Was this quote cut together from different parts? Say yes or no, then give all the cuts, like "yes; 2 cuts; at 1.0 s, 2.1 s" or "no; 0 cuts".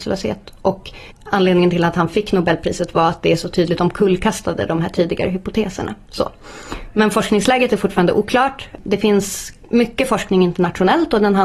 yes; 1 cut; at 1.1 s